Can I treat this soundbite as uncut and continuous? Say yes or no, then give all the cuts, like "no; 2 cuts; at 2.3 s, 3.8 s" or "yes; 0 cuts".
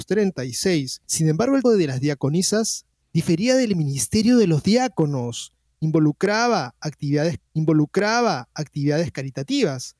no; 4 cuts; at 1.0 s, 1.6 s, 3.0 s, 7.4 s